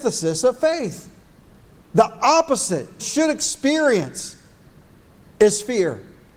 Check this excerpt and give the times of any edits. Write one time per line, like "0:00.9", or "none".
0:01.4
0:03.0